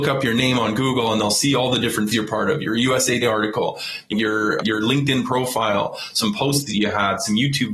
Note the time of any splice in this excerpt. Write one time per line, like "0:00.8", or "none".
0:02.1
0:03.2
0:04.1
0:04.6